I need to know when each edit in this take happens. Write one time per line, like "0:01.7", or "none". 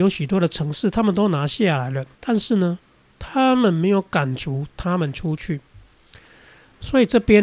0:02.1